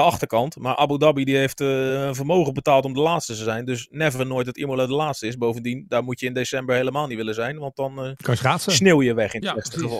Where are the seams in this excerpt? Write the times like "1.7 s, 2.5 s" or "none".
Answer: none